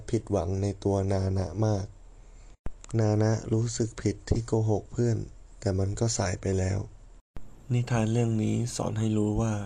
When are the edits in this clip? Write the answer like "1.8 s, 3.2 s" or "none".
7.6 s

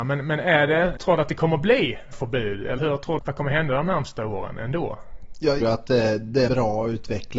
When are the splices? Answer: 1.0 s, 2.1 s, 2.8 s, 3.2 s, 5.6 s, 6.5 s

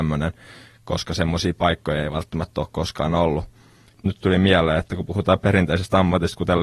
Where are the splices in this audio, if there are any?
none

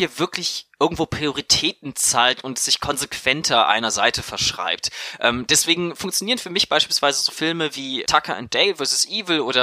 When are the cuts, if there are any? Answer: 8.0 s

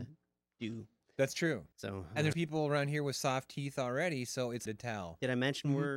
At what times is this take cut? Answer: 1.7 s, 2.3 s, 4.7 s

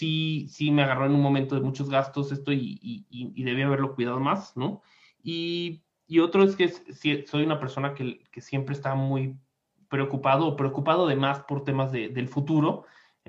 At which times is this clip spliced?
none

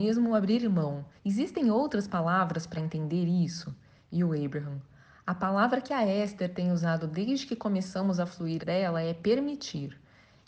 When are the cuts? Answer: 1.2 s, 2.7 s, 8.6 s

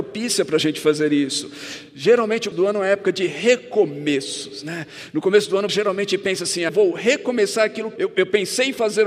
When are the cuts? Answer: 2.5 s, 5.7 s, 6.7 s, 8.0 s

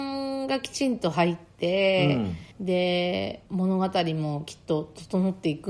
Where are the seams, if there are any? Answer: 2.5 s, 3.5 s

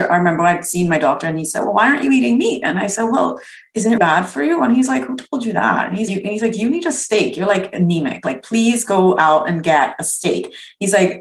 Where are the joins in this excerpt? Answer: 4.0 s, 6.1 s

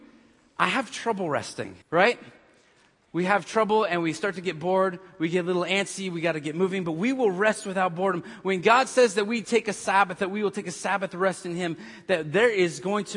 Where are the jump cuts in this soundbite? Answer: 1.8 s

